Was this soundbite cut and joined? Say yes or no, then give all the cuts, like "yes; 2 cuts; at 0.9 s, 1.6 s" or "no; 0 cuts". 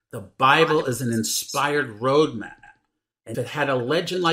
yes; 1 cut; at 3.3 s